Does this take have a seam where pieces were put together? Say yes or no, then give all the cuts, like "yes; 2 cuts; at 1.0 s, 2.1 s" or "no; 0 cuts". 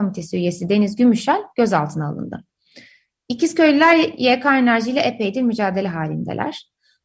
no; 0 cuts